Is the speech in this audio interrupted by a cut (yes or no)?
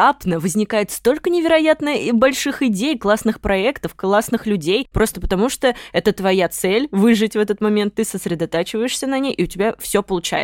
no